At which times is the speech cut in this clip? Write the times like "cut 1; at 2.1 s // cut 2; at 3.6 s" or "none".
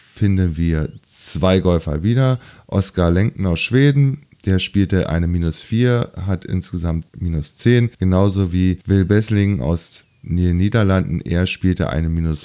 cut 1; at 7.1 s // cut 2; at 7.9 s // cut 3; at 8.8 s